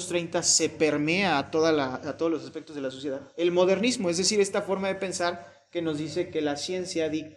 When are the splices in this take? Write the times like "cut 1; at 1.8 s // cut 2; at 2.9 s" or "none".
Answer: cut 1; at 3.3 s